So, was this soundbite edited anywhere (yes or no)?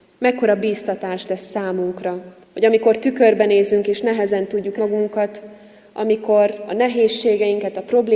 yes